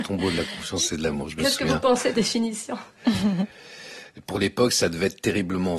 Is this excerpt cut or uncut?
cut